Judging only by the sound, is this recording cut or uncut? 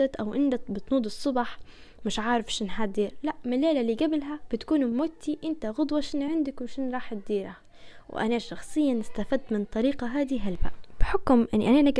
uncut